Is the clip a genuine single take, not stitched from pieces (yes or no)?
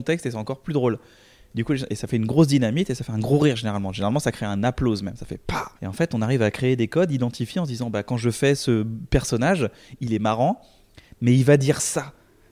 no